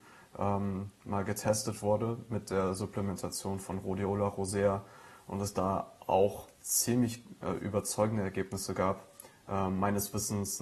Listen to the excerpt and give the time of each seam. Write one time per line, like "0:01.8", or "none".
0:06.5